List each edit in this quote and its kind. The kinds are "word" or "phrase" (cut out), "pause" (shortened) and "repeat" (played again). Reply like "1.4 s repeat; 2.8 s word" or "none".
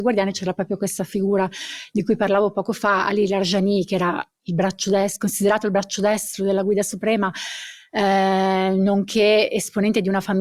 none